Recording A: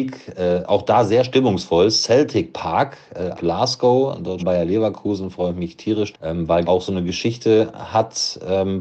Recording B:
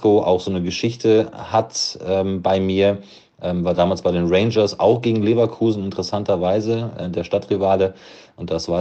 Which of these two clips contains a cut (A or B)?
A